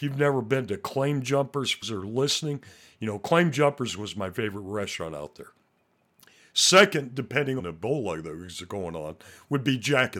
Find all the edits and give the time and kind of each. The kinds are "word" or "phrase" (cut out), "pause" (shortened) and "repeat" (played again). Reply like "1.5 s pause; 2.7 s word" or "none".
1.8 s word; 7.6 s phrase